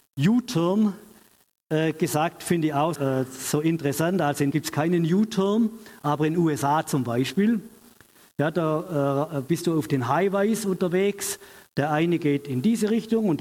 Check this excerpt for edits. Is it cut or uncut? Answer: cut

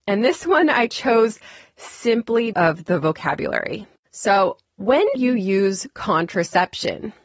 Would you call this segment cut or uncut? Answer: cut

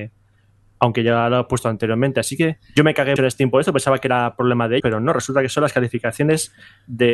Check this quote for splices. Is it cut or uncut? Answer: cut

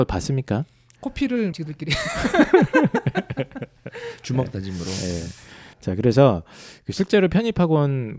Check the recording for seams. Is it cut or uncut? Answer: cut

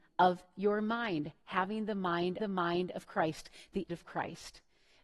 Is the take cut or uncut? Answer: cut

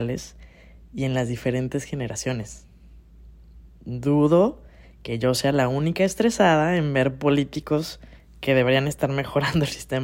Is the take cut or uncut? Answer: uncut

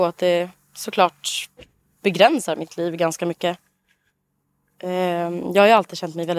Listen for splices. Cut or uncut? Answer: uncut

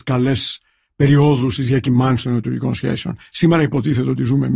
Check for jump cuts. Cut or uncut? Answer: uncut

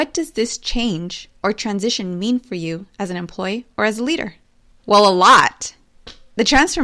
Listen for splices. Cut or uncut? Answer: cut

